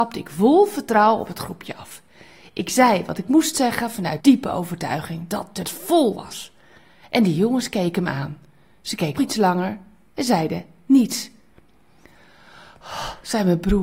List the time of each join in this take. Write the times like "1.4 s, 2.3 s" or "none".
4.2 s, 5.6 s, 9.2 s, 10.9 s